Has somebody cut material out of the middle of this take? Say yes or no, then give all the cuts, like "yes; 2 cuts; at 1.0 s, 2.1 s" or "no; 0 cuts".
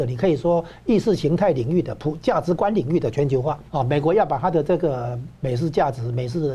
yes; 2 cuts; at 3.7 s, 5.3 s